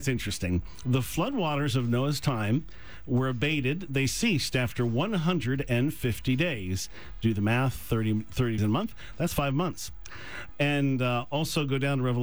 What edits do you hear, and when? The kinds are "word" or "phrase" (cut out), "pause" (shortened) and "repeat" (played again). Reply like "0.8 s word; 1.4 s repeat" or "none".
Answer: 8.6 s word